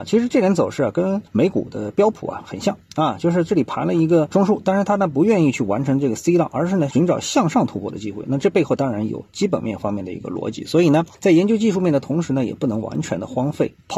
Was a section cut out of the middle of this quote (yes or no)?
yes